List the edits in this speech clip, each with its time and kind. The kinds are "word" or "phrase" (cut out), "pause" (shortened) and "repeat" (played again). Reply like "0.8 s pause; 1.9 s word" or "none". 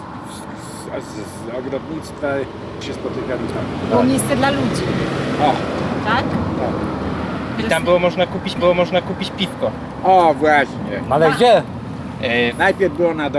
2.8 s word; 8.6 s repeat